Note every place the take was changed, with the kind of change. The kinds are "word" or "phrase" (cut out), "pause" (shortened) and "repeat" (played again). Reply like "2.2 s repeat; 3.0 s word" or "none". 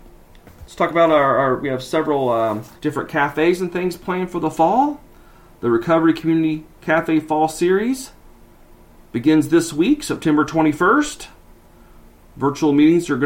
2.8 s pause